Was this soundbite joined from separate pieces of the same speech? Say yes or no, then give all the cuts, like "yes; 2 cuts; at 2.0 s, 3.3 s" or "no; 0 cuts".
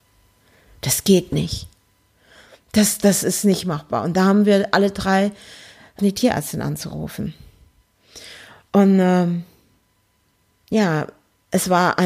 yes; 1 cut; at 6.0 s